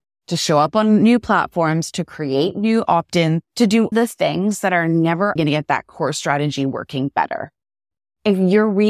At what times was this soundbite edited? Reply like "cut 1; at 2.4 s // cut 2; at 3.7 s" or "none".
cut 1; at 3.5 s // cut 2; at 3.9 s // cut 3; at 5.4 s

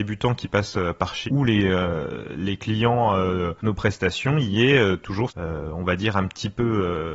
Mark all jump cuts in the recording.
cut 1; at 1.3 s // cut 2; at 3.6 s // cut 3; at 5.3 s

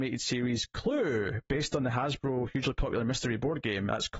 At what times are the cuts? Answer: none

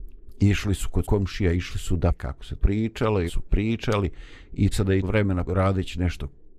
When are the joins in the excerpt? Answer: cut 1; at 1.0 s // cut 2; at 2.1 s // cut 3; at 2.6 s // cut 4; at 3.3 s // cut 5; at 4.7 s // cut 6; at 5.0 s // cut 7; at 5.5 s

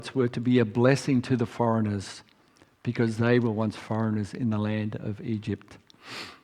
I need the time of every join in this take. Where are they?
none

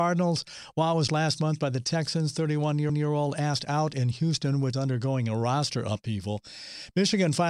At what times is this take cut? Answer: cut 1; at 1.1 s // cut 2; at 2.9 s // cut 3; at 4.7 s

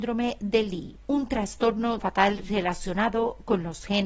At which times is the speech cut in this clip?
cut 1; at 2.0 s

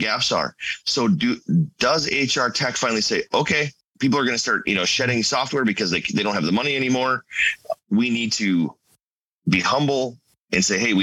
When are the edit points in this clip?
none

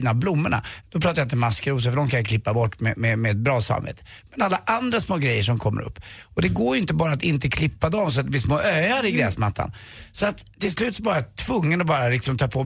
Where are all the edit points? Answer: cut 1; at 10.5 s

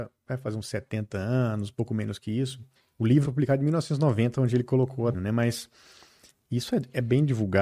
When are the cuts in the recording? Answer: cut 1; at 2.8 s // cut 2; at 3.2 s // cut 3; at 5.1 s

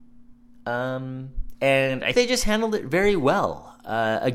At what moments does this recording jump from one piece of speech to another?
cut 1; at 1.5 s // cut 2; at 2.1 s

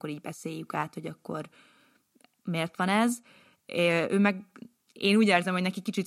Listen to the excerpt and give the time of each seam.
none

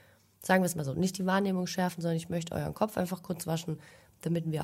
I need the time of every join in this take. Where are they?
none

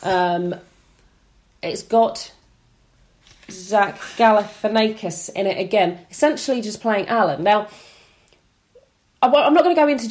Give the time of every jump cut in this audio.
none

